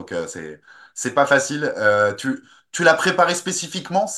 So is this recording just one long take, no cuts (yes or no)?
yes